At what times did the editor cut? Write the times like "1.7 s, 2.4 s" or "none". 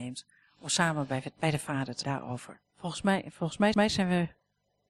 2.0 s, 2.7 s, 3.7 s